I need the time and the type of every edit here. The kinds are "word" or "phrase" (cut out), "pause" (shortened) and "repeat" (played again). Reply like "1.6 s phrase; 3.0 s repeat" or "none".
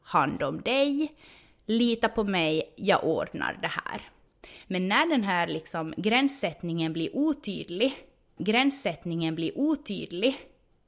8.4 s repeat